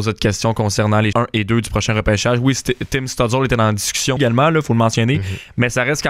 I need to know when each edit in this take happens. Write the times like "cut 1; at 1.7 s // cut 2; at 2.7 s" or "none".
cut 1; at 1.1 s // cut 2; at 4.2 s